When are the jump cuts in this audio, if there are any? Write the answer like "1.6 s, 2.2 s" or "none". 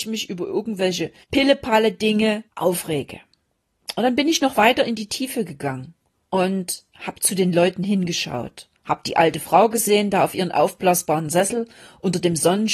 1.2 s, 2.5 s, 6.2 s, 8.8 s